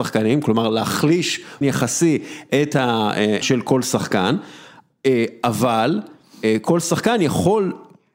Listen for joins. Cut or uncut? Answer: cut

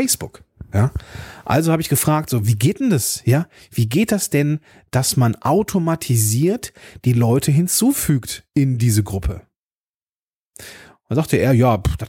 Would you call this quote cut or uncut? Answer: uncut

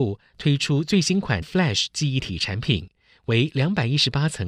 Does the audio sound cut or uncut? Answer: cut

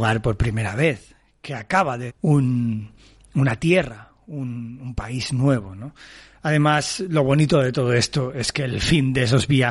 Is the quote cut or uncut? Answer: cut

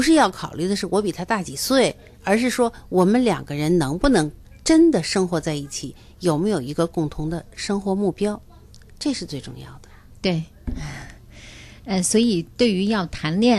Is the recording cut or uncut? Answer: uncut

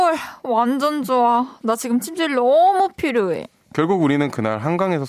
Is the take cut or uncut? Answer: uncut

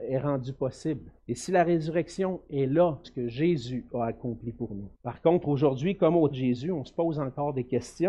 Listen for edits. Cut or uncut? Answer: cut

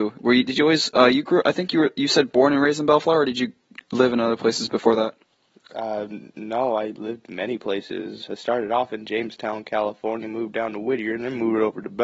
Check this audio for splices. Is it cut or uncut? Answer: uncut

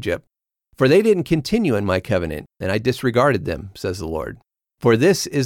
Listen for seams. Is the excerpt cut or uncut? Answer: uncut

